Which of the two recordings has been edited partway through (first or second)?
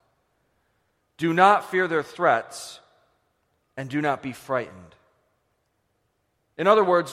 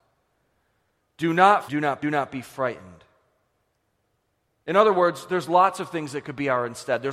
second